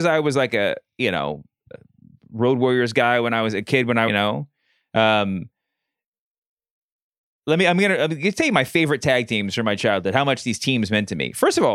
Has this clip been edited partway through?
yes; 1 cut; at 4.1 s

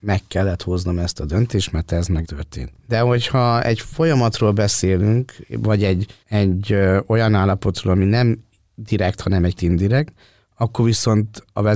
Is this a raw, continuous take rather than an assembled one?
no; 3 cuts; at 2.2 s, 6.2 s, 9.6 s

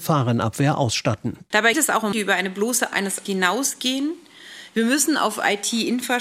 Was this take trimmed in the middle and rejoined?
yes; 4 cuts; at 1.7 s, 2.1 s, 2.9 s, 3.3 s

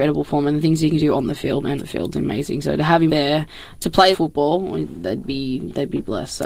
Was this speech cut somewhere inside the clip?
yes; 3 cuts; at 1.8 s, 3.1 s, 4.1 s

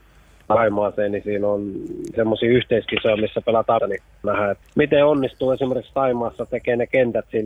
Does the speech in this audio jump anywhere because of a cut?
yes; 4 cuts; at 2.1 s, 3.8 s, 4.2 s, 4.6 s

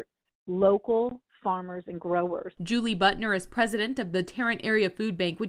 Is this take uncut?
yes; 0 cuts

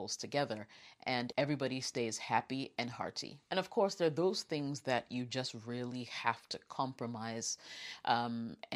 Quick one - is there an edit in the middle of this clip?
yes; 1 cut; at 3.4 s

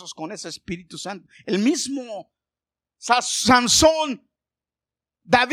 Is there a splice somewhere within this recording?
no; 0 cuts

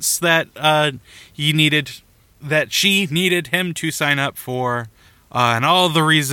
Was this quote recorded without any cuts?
yes; 0 cuts

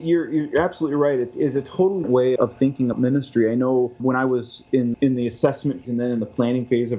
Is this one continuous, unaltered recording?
no; 6 cuts; at 2.0 s, 2.4 s, 2.9 s, 4.0 s, 4.9 s, 5.8 s

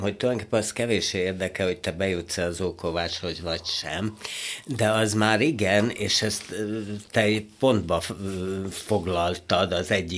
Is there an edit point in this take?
no; 0 cuts

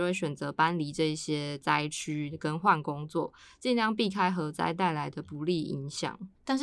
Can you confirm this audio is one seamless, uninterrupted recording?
yes; 0 cuts

